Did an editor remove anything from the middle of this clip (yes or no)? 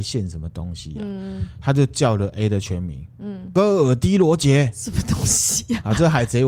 no